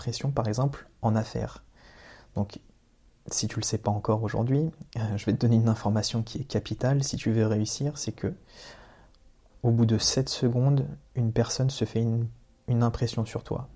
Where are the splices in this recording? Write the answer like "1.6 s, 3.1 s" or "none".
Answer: none